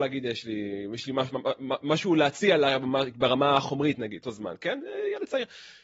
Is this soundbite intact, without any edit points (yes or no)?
no